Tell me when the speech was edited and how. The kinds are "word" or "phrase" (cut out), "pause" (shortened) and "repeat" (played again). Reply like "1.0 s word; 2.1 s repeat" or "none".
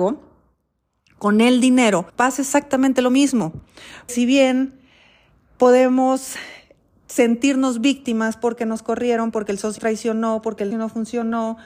2.1 s pause; 4.1 s word; 9.8 s word; 10.7 s word